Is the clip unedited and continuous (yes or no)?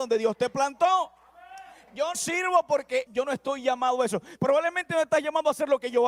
no